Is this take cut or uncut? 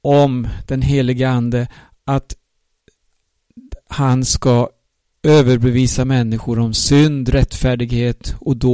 uncut